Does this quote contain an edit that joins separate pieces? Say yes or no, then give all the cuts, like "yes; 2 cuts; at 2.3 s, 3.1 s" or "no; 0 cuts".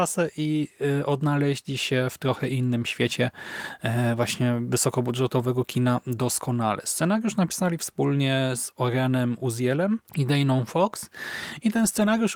yes; 1 cut; at 10.1 s